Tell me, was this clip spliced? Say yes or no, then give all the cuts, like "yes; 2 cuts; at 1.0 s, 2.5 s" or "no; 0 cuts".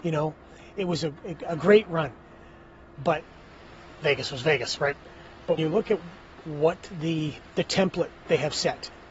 yes; 1 cut; at 5.6 s